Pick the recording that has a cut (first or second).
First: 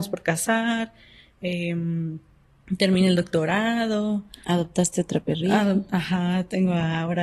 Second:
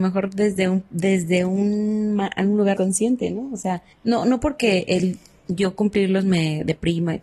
second